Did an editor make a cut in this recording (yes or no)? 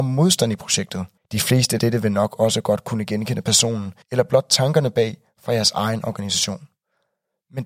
yes